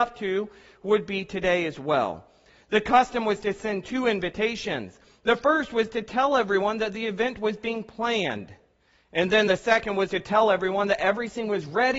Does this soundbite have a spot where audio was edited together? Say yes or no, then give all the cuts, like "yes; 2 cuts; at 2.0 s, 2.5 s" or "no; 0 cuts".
no; 0 cuts